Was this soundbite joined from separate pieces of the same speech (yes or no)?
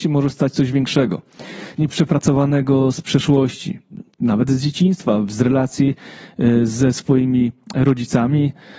yes